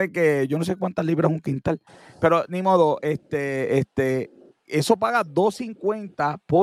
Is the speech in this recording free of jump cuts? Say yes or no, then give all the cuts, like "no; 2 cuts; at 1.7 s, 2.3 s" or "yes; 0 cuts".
yes; 0 cuts